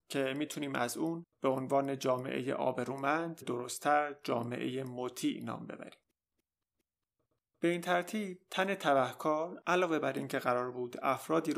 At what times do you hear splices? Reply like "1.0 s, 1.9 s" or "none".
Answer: 3.4 s